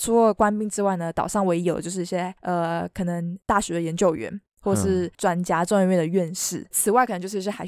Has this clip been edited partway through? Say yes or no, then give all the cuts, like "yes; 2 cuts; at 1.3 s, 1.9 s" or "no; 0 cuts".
yes; 2 cuts; at 5.1 s, 6.7 s